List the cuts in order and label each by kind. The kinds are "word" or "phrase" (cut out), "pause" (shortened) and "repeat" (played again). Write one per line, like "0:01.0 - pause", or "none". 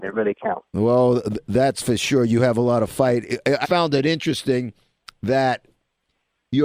0:03.6 - word